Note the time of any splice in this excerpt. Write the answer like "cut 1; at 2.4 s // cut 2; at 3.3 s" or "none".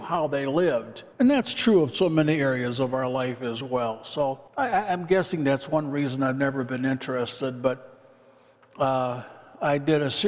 cut 1; at 1.1 s // cut 2; at 4.5 s